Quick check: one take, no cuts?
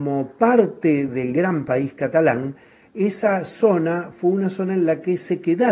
yes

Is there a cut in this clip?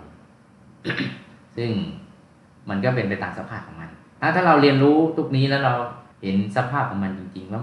yes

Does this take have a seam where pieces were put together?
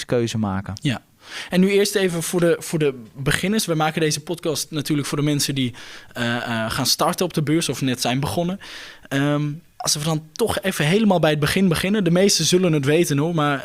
yes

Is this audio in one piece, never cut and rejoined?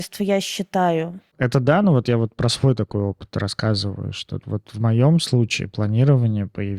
yes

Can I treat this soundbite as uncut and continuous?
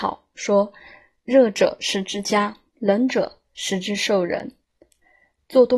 no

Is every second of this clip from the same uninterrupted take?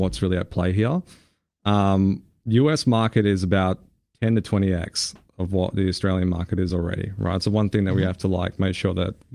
yes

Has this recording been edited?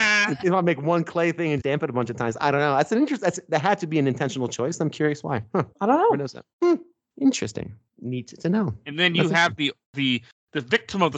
yes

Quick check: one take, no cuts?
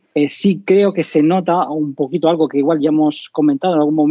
yes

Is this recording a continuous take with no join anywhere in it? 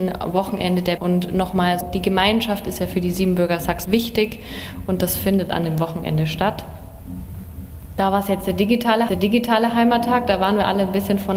no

